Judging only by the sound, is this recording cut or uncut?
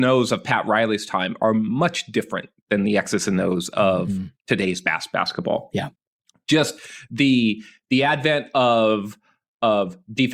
uncut